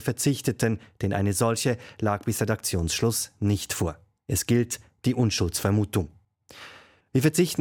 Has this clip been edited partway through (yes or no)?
no